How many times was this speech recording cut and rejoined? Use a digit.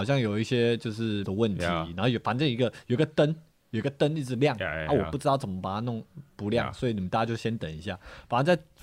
1